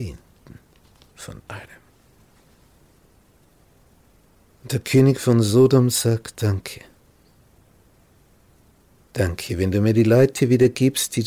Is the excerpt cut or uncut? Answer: uncut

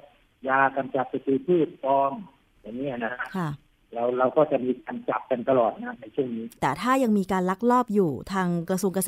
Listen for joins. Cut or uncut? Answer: uncut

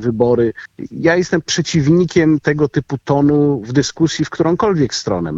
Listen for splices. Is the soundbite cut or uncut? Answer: uncut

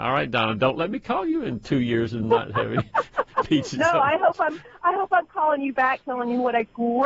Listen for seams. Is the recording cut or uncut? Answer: uncut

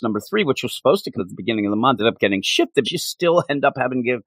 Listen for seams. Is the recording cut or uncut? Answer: cut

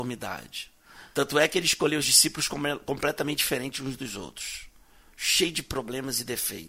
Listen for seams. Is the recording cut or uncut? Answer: cut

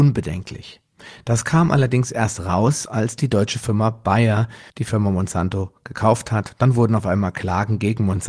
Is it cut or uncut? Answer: cut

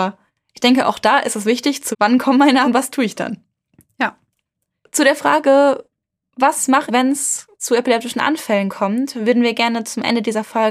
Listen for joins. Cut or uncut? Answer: cut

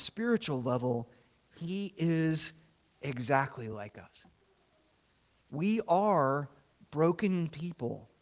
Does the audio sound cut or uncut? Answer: uncut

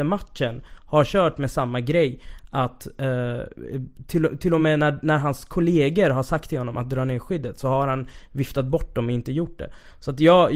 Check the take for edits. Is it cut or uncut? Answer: uncut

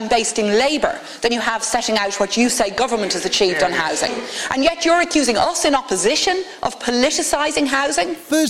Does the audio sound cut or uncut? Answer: uncut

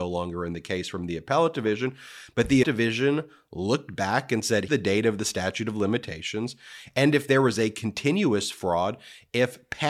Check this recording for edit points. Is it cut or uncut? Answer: cut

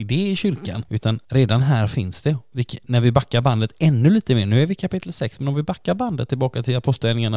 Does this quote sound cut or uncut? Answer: uncut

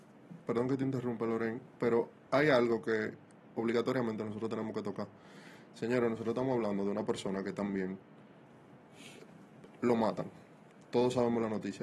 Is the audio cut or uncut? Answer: uncut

